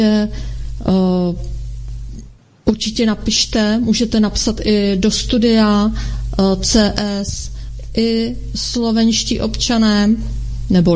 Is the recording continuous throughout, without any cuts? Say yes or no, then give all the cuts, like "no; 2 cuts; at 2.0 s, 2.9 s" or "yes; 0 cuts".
yes; 0 cuts